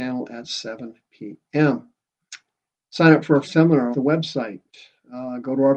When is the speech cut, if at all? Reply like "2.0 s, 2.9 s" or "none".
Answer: 3.4 s, 3.9 s